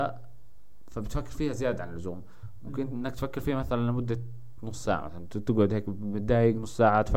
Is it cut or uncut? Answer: uncut